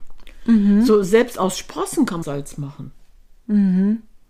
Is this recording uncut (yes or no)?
no